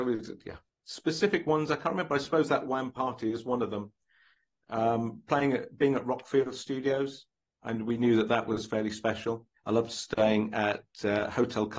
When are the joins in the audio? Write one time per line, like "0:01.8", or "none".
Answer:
none

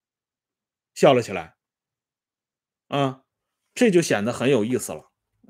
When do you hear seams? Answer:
0:03.3

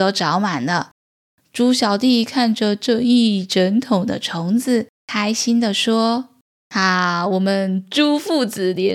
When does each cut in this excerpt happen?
0:05.0

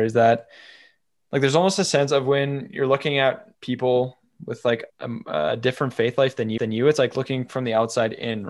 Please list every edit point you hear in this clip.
0:03.5
0:04.9
0:06.6

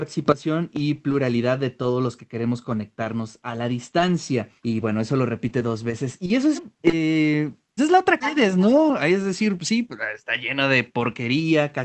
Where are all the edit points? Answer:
0:04.6
0:06.6
0:07.8
0:08.2

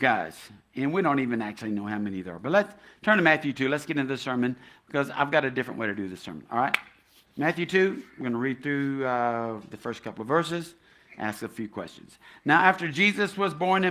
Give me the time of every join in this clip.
none

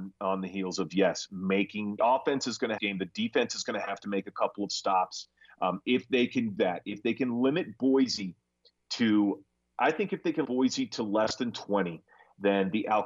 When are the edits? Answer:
0:02.0
0:02.8
0:06.6
0:10.4

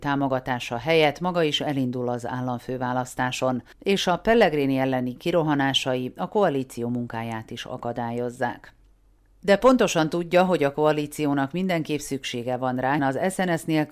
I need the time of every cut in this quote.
0:03.7
0:13.0

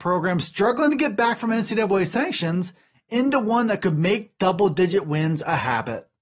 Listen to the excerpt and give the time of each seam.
none

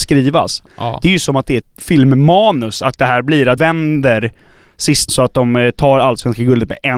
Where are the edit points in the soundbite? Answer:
0:01.6
0:03.6
0:05.1

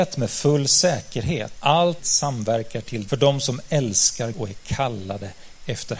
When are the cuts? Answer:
0:01.6
0:02.0
0:03.1
0:04.3

